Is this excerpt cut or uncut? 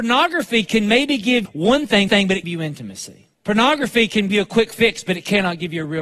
cut